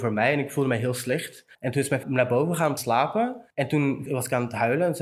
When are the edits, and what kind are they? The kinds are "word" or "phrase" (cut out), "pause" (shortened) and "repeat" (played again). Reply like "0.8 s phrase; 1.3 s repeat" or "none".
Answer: 1.5 s pause; 2.0 s word; 2.8 s word; 3.5 s pause; 4.1 s word